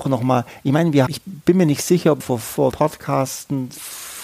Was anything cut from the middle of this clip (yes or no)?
yes